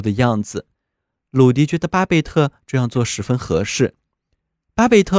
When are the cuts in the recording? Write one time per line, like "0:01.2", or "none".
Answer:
none